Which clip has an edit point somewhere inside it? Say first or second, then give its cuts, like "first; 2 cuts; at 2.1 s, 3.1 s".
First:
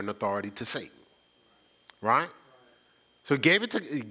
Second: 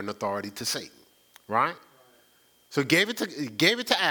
second; 1 cut; at 1.1 s